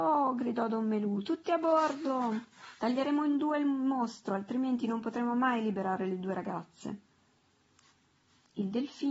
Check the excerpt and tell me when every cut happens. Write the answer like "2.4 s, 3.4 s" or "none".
2.8 s

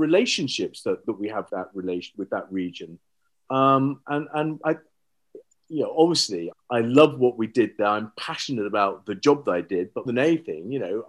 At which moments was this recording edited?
1.0 s, 1.5 s, 2.1 s, 4.6 s, 6.5 s, 10.1 s

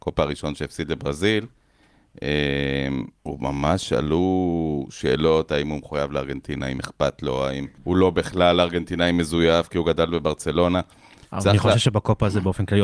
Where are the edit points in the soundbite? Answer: 3.2 s, 7.8 s

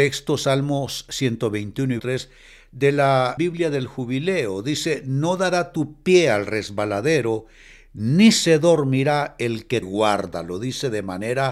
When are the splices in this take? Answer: 2.0 s, 3.4 s, 9.8 s

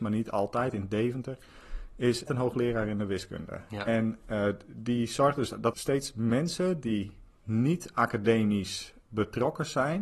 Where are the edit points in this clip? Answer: 2.3 s, 5.7 s

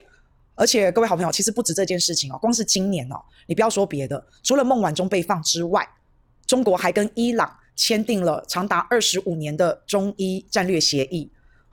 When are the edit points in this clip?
none

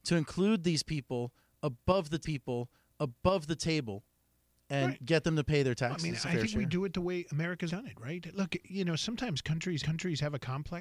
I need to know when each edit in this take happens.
2.2 s, 6.2 s, 7.7 s, 9.8 s

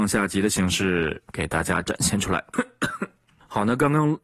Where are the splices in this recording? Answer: none

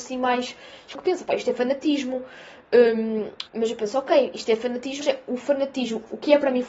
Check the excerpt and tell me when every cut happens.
0.9 s, 3.5 s, 5.0 s

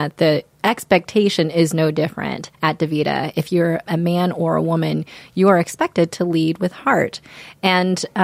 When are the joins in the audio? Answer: 2.5 s, 3.9 s

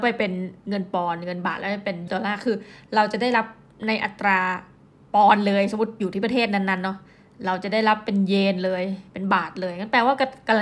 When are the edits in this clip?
2.1 s

